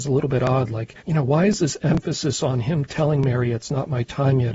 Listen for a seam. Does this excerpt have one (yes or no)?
yes